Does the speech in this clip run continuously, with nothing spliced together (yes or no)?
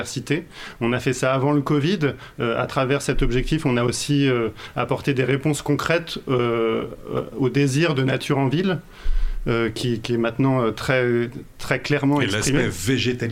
yes